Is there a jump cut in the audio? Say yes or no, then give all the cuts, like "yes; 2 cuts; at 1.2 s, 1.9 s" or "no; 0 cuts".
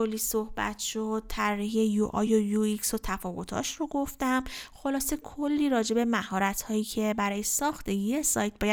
no; 0 cuts